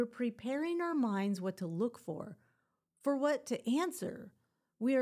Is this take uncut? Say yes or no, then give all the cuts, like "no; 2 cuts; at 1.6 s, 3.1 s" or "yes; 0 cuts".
yes; 0 cuts